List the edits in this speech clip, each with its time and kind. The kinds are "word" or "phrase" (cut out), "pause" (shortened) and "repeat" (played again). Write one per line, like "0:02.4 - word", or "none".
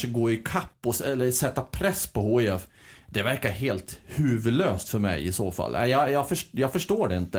none